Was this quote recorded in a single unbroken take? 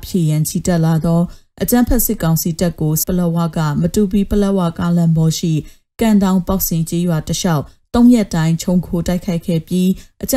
no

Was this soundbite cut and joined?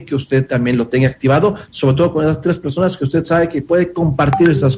no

